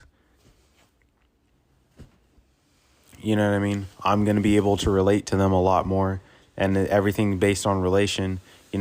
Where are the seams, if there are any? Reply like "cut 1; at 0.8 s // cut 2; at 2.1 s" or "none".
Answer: cut 1; at 3.9 s